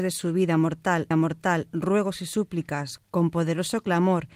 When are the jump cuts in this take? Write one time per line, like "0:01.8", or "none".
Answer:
0:01.1
0:03.0

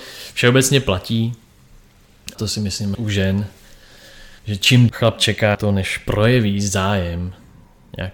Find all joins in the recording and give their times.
0:02.3
0:02.9
0:04.4
0:04.9
0:05.5

